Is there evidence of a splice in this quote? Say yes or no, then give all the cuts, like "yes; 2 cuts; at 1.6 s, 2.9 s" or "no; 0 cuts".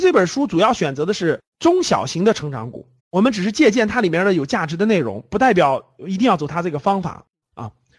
yes; 1 cut; at 3.0 s